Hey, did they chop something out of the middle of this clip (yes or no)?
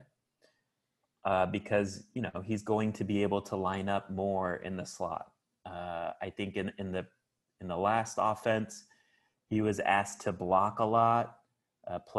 no